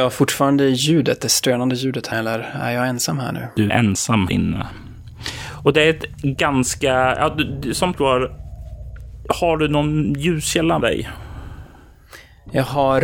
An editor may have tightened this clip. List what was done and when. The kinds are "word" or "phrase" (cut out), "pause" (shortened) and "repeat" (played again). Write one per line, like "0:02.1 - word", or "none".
0:02.1 - word
0:03.7 - word
0:04.3 - word
0:07.9 - word
0:10.8 - word